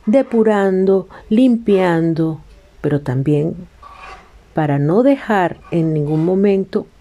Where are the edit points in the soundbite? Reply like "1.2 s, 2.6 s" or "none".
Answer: none